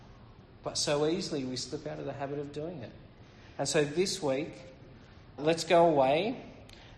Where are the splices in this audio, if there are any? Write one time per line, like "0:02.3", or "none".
0:05.4